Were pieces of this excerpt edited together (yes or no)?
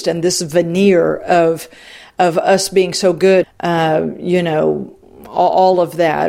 yes